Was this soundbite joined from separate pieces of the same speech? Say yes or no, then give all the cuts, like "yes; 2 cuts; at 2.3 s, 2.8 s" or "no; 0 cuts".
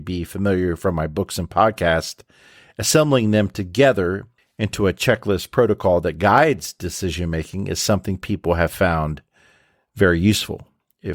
yes; 1 cut; at 4.4 s